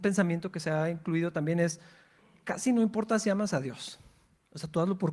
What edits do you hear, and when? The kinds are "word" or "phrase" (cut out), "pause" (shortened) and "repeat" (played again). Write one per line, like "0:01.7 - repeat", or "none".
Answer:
none